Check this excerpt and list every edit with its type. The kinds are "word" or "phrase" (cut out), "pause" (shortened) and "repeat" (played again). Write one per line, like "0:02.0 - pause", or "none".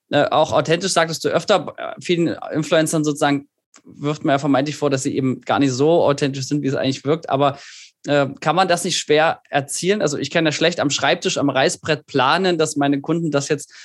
none